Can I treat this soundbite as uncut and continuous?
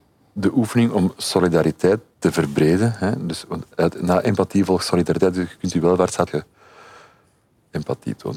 no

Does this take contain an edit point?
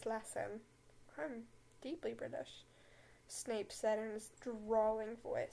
yes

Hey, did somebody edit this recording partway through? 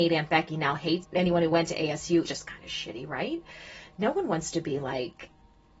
yes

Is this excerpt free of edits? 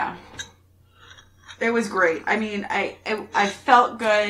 yes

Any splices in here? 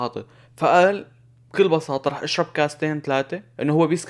no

